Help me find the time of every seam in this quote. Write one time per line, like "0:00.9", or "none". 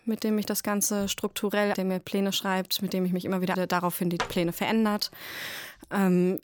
0:01.7
0:03.5